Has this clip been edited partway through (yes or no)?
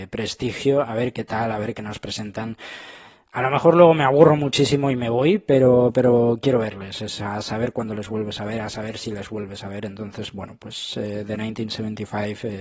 no